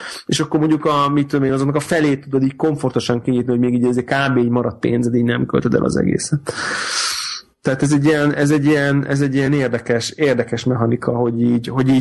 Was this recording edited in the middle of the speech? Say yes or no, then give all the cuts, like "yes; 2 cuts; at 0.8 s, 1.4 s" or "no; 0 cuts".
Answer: no; 0 cuts